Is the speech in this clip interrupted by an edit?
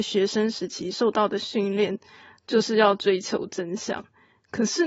no; 0 cuts

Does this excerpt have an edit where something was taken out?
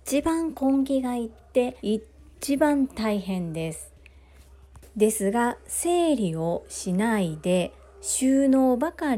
yes; 2 cuts; at 1.8 s, 4.9 s

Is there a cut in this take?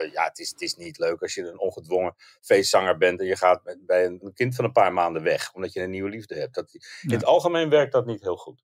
no; 0 cuts

